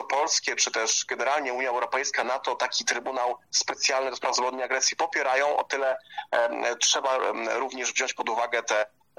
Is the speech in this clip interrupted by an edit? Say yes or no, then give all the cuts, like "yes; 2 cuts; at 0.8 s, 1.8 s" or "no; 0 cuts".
no; 0 cuts